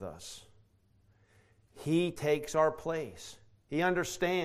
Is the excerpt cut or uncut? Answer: uncut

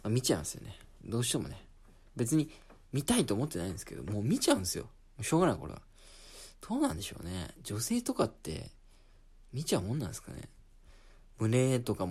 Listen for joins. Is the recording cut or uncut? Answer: uncut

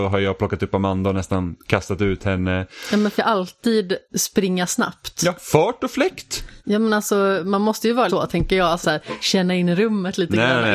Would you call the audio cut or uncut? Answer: cut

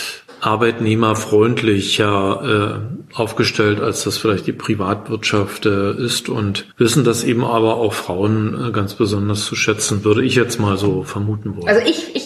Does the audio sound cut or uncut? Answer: cut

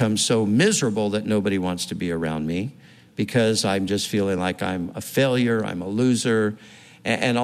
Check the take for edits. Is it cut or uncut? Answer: uncut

